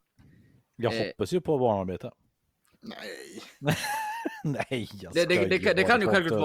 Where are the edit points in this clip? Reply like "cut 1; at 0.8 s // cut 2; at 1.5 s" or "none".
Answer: none